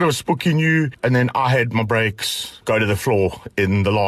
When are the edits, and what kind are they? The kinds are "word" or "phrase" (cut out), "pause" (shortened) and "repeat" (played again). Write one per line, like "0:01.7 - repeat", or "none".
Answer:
none